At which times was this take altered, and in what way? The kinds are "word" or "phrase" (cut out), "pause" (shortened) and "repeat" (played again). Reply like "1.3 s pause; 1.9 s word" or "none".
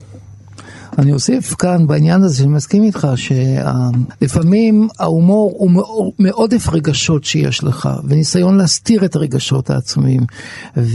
none